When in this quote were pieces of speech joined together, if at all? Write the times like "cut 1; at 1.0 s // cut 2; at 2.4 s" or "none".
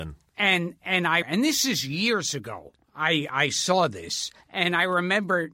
cut 1; at 1.2 s // cut 2; at 4.4 s